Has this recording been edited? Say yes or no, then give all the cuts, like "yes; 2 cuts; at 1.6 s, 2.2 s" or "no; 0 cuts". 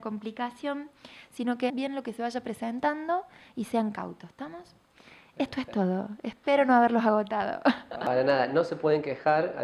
yes; 1 cut; at 1.7 s